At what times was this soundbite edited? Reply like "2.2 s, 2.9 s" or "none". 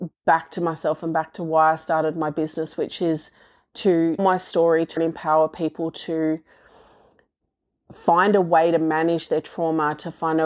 4.2 s, 5.0 s

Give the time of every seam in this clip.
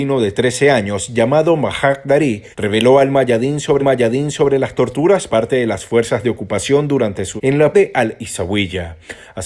2.5 s, 3.8 s, 5.3 s, 7.4 s, 7.7 s

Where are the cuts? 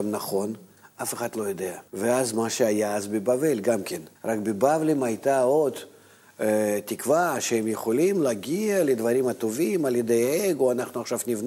1.9 s, 4.2 s

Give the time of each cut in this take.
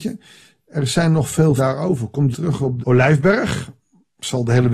1.6 s, 2.3 s, 2.8 s

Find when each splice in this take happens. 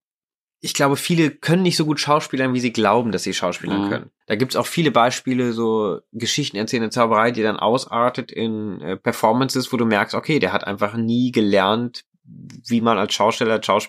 4.2 s

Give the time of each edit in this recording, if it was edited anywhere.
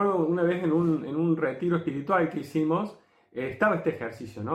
none

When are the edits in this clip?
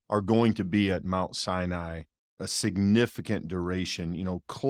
2.4 s

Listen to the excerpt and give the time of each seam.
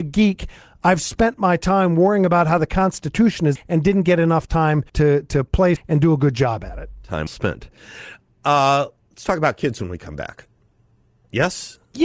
3.6 s, 4.9 s, 5.8 s, 7.3 s

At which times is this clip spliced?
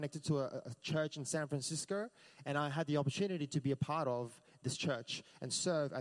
none

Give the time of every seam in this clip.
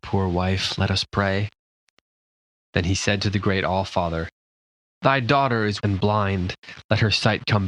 5.8 s

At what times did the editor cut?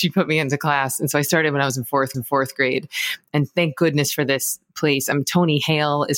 2.1 s

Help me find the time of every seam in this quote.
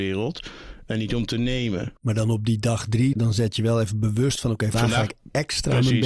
2.0 s, 3.1 s, 4.7 s

